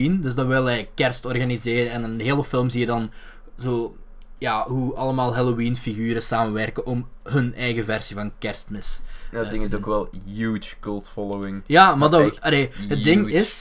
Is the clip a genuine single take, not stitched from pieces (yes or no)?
yes